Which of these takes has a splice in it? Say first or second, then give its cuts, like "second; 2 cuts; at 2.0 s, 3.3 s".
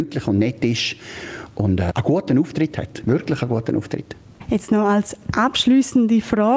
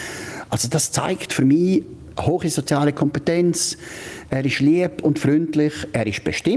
second; 1 cut; at 2.2 s